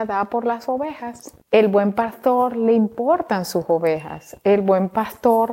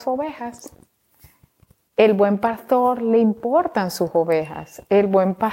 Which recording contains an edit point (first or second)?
first